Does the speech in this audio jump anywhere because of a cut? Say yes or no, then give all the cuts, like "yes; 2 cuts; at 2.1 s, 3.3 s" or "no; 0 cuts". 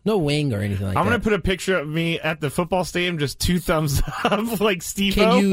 no; 0 cuts